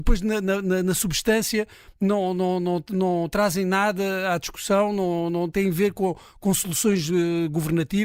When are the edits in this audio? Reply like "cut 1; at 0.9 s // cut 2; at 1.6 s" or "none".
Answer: none